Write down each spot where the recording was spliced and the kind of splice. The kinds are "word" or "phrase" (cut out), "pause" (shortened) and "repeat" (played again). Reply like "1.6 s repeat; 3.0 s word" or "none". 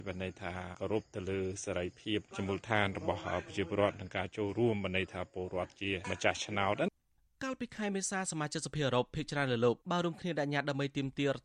9.8 s pause